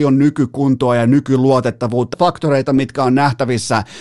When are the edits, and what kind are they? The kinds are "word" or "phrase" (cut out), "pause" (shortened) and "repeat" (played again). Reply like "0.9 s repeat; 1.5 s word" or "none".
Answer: 2.1 s word